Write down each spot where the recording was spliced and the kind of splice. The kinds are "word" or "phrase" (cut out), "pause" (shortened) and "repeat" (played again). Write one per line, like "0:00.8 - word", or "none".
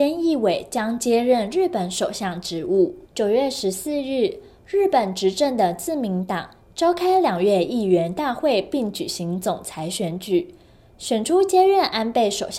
0:03.1 - pause